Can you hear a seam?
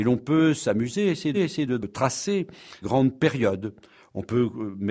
yes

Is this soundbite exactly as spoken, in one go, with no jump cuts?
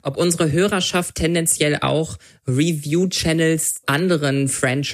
no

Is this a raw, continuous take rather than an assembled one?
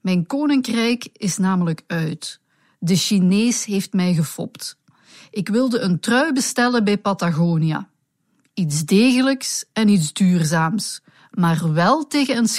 yes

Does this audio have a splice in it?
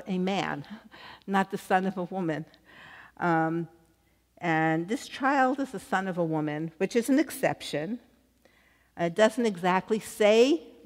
no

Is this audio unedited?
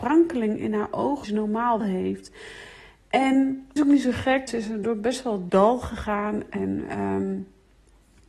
no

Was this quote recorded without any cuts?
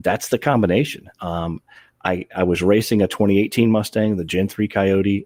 yes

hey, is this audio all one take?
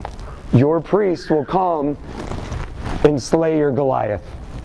yes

